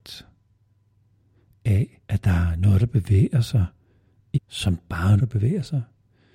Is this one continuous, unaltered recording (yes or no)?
no